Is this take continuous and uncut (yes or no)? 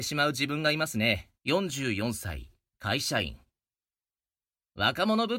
no